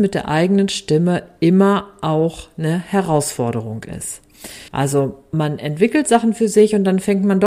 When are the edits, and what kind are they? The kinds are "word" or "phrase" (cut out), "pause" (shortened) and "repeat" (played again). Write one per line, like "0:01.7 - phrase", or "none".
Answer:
0:04.7 - pause